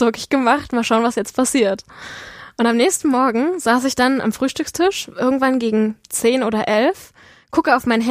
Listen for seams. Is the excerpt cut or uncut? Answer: uncut